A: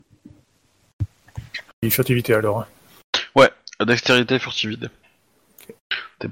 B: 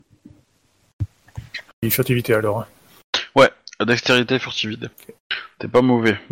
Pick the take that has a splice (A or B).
B